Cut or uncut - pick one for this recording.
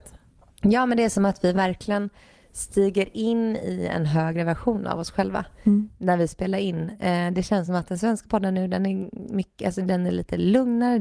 uncut